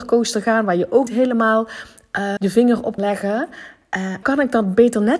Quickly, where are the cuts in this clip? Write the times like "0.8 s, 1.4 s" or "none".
1.1 s, 2.4 s, 3.0 s, 4.2 s